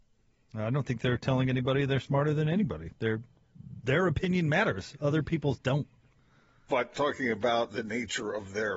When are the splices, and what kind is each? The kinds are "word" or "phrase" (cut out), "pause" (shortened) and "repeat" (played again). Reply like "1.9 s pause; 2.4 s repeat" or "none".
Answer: 6.9 s word